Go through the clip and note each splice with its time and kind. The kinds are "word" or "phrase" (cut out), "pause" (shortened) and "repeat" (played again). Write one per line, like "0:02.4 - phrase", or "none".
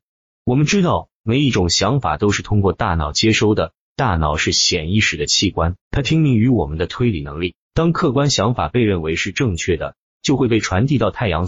0:05.8 - pause
0:07.6 - pause